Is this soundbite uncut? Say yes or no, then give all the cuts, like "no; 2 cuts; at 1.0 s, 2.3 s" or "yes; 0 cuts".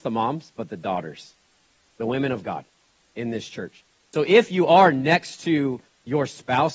yes; 0 cuts